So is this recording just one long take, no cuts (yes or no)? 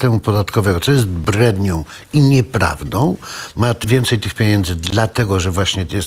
yes